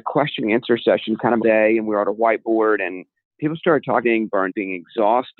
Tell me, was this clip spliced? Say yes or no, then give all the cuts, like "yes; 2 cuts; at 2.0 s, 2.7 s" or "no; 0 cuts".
yes; 4 cuts; at 1.4 s, 3.2 s, 4.0 s, 4.5 s